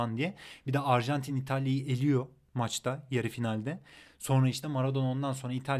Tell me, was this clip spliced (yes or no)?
no